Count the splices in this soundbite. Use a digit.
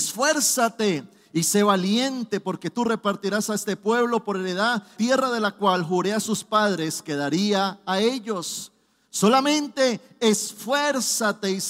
1